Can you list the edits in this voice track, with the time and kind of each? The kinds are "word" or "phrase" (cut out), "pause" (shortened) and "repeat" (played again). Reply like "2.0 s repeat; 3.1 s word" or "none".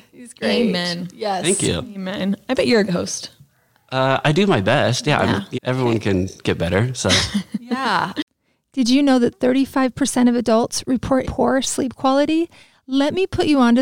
2.9 s word; 4.2 s word; 5.5 s word; 11.2 s word